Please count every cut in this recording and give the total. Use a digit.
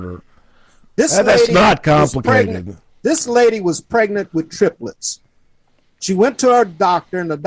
0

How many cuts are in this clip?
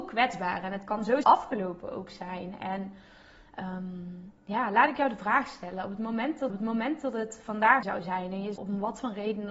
5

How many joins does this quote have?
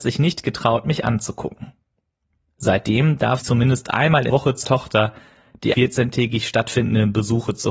4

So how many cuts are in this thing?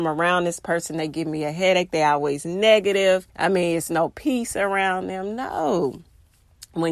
1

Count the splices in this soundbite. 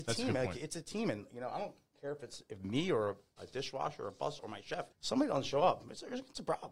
3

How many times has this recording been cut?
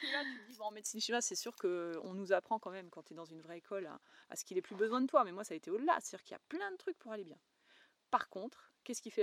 0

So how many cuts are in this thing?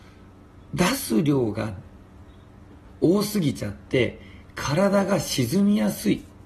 0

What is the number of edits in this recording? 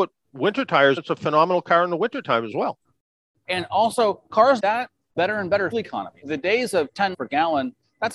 7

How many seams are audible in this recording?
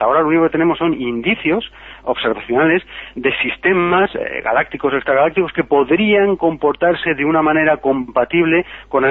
0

